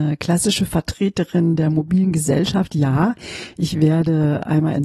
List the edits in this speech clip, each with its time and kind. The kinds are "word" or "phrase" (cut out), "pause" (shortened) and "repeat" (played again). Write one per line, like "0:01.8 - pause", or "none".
none

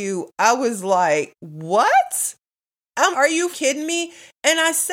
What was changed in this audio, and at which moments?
0:01.4 - word
0:03.1 - word
0:03.5 - word

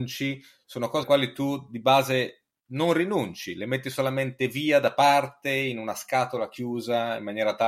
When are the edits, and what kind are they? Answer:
0:01.0 - word

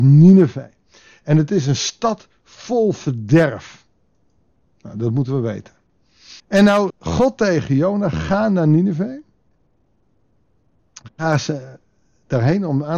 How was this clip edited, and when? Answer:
0:06.4 - pause
0:06.9 - word

